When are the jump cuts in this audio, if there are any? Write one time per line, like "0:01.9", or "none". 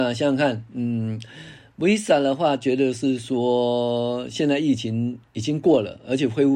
0:05.3